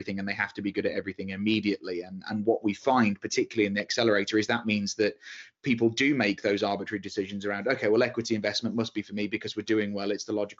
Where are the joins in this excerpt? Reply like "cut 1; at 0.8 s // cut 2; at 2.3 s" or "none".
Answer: none